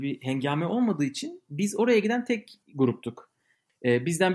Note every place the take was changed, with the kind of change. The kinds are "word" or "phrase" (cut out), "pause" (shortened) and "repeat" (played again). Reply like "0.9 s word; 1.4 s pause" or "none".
2.6 s pause